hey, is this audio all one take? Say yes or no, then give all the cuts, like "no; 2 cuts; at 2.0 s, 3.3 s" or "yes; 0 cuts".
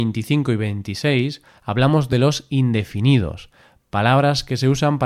yes; 0 cuts